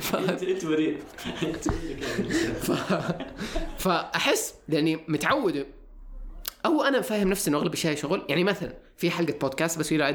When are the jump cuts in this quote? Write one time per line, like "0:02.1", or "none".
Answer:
none